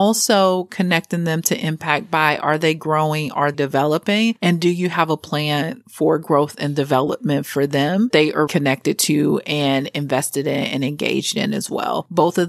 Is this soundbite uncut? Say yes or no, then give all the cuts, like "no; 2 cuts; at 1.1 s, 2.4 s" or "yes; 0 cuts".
no; 3 cuts; at 3.5 s, 8.1 s, 8.5 s